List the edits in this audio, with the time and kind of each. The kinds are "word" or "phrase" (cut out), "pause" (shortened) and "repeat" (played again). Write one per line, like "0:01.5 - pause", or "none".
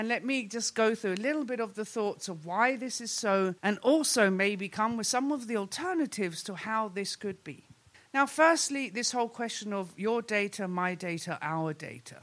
0:03.6 - pause
0:07.9 - pause